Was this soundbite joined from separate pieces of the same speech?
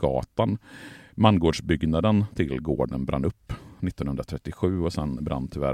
no; 0 cuts

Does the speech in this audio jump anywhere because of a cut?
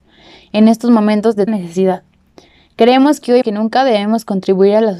yes; 2 cuts; at 1.5 s, 3.4 s

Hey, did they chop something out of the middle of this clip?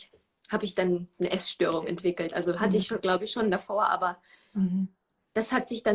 no; 0 cuts

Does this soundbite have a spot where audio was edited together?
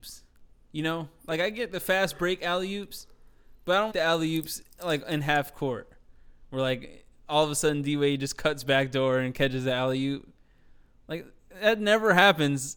yes; 1 cut; at 3.9 s

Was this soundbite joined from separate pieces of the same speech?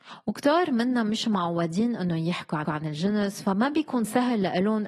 yes; 1 cut; at 2.6 s

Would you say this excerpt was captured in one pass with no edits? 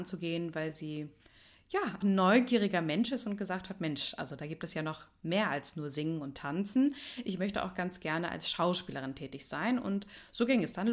no; 1 cut; at 2.0 s

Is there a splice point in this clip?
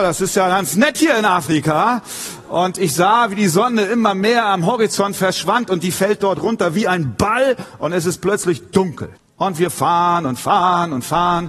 yes; 1 cut; at 9.2 s

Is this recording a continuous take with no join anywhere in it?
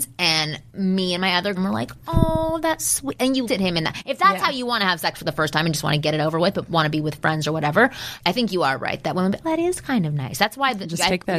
no; 5 cuts; at 1.6 s, 2.8 s, 3.5 s, 8.2 s, 9.4 s

